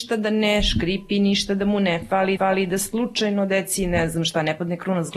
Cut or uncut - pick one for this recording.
cut